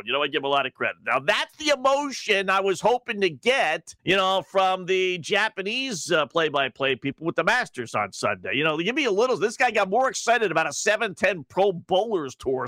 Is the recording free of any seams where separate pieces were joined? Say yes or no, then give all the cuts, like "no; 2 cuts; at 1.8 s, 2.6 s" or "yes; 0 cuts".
no; 1 cut; at 4.0 s